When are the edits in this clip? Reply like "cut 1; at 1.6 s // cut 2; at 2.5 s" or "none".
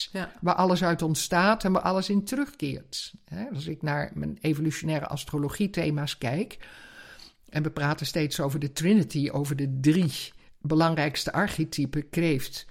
none

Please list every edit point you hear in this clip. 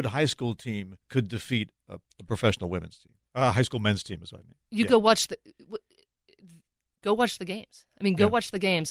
cut 1; at 1.0 s

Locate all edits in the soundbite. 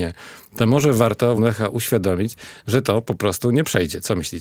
cut 1; at 1.4 s

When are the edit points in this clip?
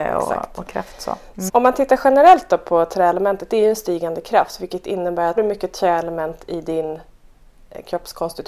cut 1; at 1.5 s // cut 2; at 5.4 s

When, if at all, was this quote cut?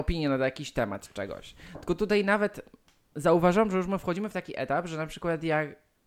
none

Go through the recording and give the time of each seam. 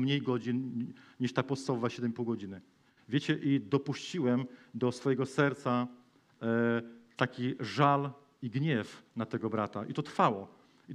none

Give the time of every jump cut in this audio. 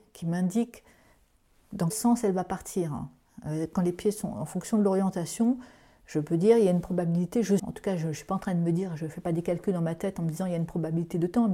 cut 1; at 1.9 s // cut 2; at 7.6 s

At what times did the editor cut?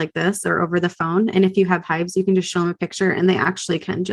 none

